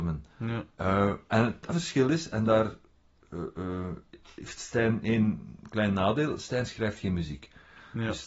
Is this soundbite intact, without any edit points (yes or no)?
no